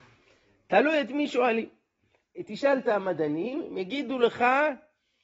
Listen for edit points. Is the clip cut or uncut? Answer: uncut